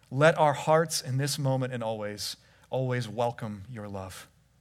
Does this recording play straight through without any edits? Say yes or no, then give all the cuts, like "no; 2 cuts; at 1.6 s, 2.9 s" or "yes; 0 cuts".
yes; 0 cuts